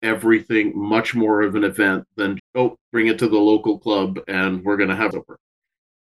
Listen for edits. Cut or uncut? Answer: cut